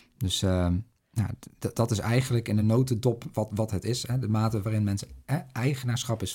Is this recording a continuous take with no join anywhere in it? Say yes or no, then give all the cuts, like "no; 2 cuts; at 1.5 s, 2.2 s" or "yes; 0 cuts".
yes; 0 cuts